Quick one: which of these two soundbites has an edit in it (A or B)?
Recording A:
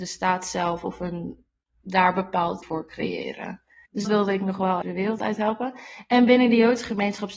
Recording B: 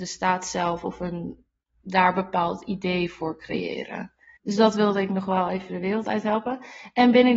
A